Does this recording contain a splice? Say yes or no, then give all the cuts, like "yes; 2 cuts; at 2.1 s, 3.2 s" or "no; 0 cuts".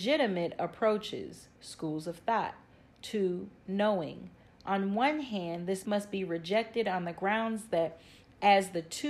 yes; 2 cuts; at 1.5 s, 5.8 s